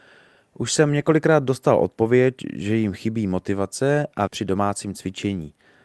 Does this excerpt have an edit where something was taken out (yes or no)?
yes